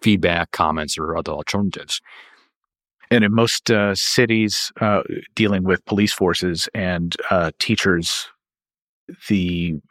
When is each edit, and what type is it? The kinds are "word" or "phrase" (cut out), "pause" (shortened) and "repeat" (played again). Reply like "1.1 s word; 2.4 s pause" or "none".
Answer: none